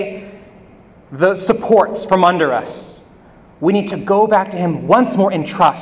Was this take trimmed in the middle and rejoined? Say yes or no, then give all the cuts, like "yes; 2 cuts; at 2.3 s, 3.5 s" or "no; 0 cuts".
no; 0 cuts